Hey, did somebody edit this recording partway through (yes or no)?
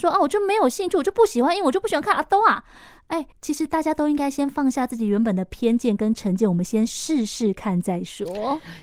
yes